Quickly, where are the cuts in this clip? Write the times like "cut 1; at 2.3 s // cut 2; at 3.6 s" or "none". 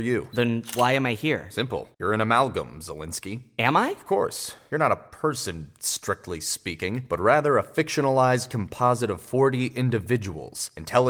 cut 1; at 1.9 s